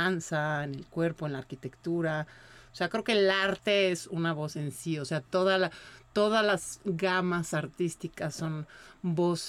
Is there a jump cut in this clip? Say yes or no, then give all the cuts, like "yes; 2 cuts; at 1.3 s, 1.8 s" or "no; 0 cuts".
no; 0 cuts